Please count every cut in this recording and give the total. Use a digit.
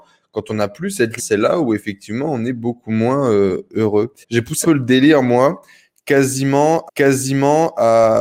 4